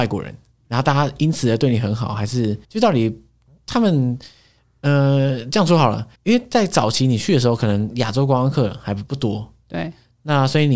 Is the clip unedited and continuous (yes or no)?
no